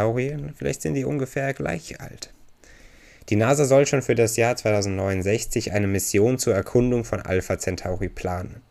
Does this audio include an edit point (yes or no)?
no